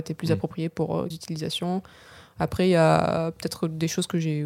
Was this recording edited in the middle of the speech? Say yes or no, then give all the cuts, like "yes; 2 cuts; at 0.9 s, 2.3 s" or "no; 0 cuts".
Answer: yes; 1 cut; at 1.1 s